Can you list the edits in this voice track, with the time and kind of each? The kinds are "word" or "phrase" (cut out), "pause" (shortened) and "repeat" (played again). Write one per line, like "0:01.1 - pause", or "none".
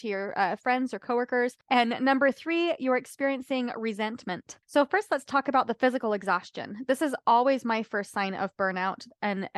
0:01.6 - pause
0:04.6 - pause

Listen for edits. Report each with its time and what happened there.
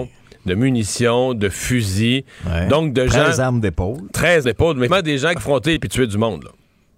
0:04.4 - word
0:04.9 - word
0:05.4 - phrase
0:05.8 - phrase

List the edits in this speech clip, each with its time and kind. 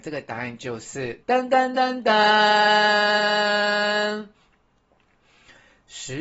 0:01.2 - pause

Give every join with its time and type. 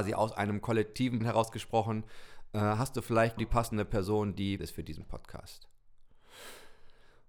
0:01.2 - word
0:03.4 - word
0:04.6 - word

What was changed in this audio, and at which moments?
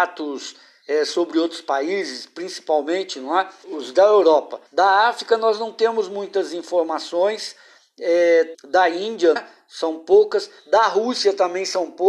0:03.6 - word
0:04.7 - pause
0:08.5 - word
0:09.4 - word

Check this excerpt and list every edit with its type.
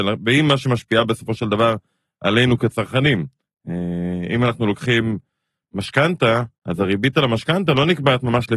0:06.6 - pause

